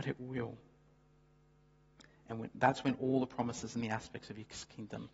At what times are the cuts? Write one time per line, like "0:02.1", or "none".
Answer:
none